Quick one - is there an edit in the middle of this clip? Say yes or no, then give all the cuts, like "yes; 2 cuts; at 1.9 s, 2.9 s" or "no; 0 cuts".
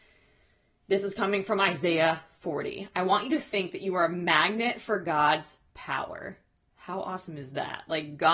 no; 0 cuts